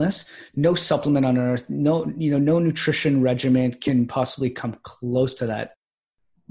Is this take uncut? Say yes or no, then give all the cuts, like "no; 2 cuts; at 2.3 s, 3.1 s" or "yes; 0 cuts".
yes; 0 cuts